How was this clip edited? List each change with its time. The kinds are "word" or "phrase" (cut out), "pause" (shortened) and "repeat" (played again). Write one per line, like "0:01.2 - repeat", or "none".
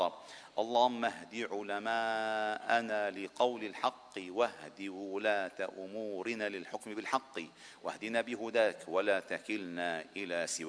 none